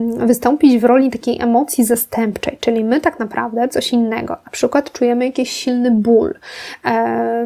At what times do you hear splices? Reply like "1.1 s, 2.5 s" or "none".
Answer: 3.7 s